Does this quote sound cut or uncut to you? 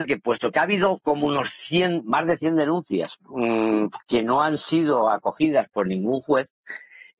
uncut